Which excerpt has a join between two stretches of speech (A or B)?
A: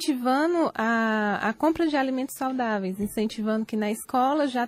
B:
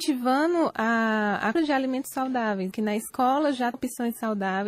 B